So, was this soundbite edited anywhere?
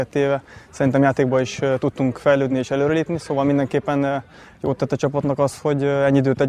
no; 0 cuts

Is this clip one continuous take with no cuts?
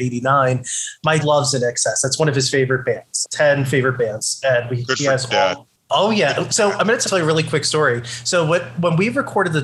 no; 3 cuts; at 1.2 s, 3.2 s, 7.0 s

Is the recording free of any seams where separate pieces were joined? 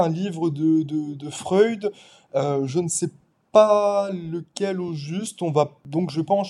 yes; 0 cuts

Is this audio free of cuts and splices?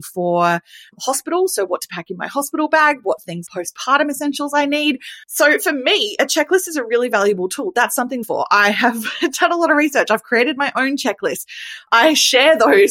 no; 3 cuts; at 3.5 s, 5.2 s, 8.2 s

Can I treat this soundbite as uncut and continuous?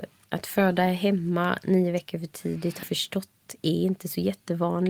no; 1 cut; at 2.8 s

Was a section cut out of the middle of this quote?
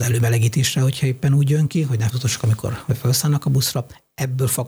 yes; 1 cut; at 2.1 s

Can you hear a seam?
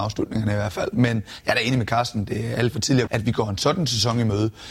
yes; 1 cut; at 3.1 s

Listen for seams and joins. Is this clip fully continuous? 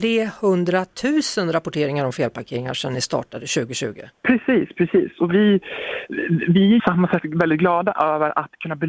no; 2 cuts; at 4.2 s, 6.8 s

